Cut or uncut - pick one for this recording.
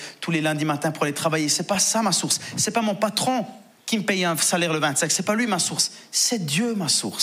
uncut